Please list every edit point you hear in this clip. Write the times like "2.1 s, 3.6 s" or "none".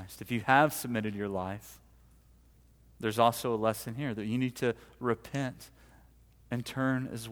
none